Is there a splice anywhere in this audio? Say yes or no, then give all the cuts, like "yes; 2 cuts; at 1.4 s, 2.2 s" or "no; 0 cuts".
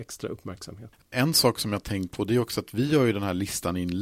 no; 0 cuts